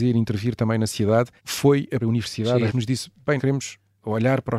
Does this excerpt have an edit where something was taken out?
yes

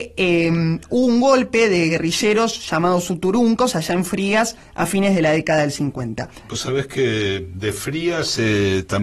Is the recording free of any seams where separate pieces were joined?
yes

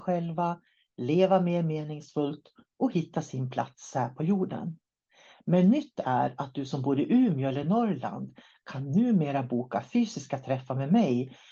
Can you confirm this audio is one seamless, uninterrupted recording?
yes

